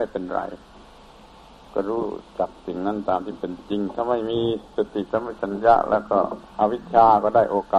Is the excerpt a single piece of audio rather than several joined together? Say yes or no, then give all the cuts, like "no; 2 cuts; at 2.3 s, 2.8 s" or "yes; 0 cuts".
no; 1 cut; at 6.5 s